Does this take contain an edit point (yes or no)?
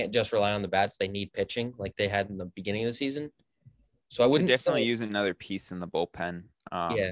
no